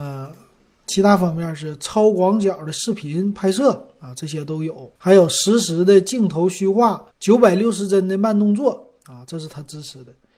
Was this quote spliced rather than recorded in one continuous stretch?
yes; 2 cuts; at 5.0 s, 7.1 s

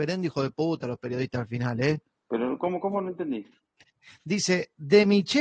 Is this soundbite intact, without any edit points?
yes; 0 cuts

